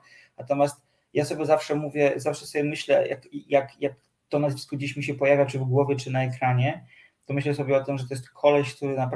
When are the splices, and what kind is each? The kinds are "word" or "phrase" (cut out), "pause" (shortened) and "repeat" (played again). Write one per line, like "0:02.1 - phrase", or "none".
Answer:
none